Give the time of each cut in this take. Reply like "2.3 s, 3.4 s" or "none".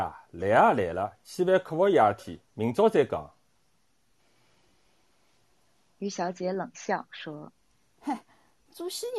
none